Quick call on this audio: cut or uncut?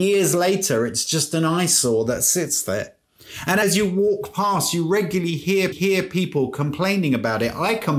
cut